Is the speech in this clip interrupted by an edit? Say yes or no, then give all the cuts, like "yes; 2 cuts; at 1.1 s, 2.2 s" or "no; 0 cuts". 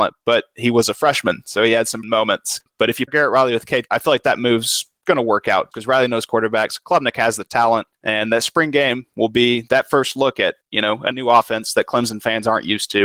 yes; 5 cuts; at 2.0 s, 3.1 s, 3.9 s, 5.7 s, 11.1 s